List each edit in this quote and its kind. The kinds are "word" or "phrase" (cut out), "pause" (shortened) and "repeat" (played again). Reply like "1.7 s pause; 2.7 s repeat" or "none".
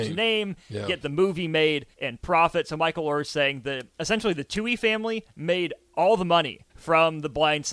1.9 s pause; 3.9 s pause; 6.7 s pause